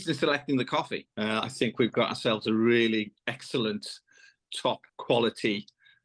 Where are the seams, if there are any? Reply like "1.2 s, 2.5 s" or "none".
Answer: 1.1 s, 4.9 s

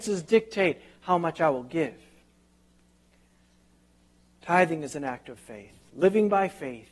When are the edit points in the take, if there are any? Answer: none

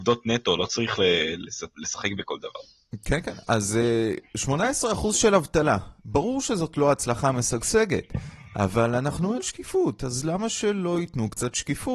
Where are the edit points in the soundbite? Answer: 6.0 s, 9.4 s

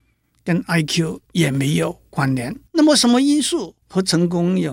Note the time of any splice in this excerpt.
1.2 s, 2.7 s, 3.8 s

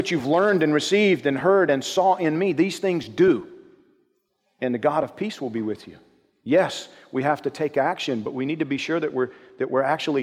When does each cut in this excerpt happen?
none

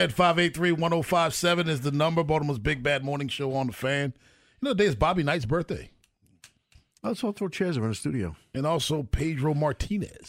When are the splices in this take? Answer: none

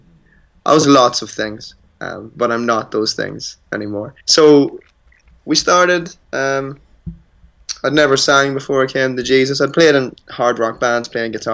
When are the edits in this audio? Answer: 1.9 s, 4.2 s, 6.2 s

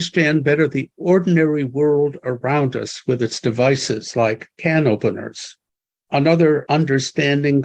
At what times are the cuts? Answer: none

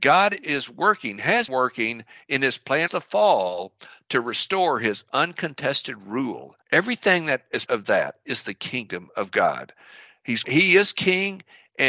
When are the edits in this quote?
1.5 s, 2.9 s, 6.6 s, 7.7 s, 10.4 s

